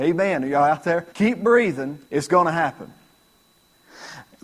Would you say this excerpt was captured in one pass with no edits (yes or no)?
no